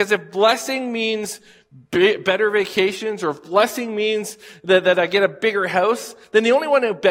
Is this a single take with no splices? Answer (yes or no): yes